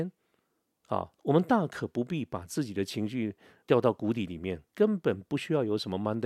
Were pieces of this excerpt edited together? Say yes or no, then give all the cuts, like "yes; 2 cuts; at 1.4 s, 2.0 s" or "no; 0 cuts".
yes; 3 cuts; at 1.2 s, 3.6 s, 4.7 s